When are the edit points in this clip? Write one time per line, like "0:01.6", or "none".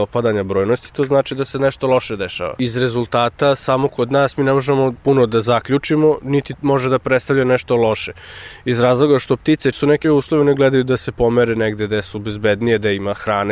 0:06.5
0:09.7
0:10.0